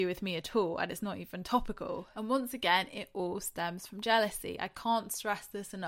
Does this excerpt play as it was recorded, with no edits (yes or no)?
yes